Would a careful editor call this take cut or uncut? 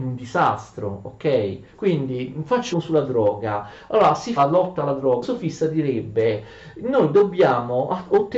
cut